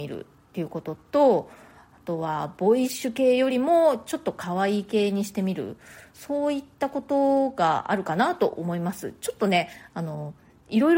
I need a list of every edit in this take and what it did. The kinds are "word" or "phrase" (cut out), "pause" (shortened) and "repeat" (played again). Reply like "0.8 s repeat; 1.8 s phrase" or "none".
none